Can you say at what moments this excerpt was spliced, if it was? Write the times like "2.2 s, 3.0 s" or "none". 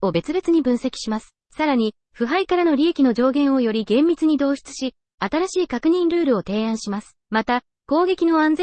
1.4 s, 7.2 s